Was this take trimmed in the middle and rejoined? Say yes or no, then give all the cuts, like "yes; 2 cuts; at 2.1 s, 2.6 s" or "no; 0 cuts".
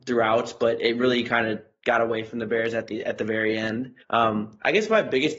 yes; 1 cut; at 4.0 s